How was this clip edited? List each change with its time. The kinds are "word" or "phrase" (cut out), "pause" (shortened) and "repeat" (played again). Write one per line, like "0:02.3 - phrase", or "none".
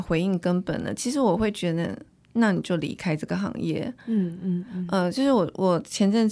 none